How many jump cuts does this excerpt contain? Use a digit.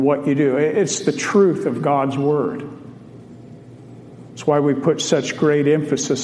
0